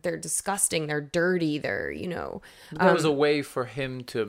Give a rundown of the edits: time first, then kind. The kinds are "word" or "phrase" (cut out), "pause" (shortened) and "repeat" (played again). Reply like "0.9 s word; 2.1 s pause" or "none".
none